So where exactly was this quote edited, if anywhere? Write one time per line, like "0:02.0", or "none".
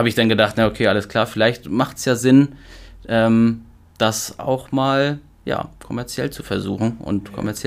none